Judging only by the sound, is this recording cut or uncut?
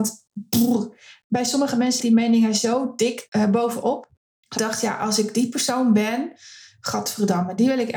cut